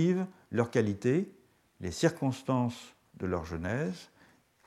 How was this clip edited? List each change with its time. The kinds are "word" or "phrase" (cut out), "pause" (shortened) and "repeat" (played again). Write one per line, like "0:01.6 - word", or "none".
none